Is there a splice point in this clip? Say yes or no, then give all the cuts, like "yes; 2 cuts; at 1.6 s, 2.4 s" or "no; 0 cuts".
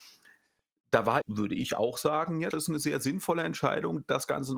yes; 2 cuts; at 1.2 s, 2.5 s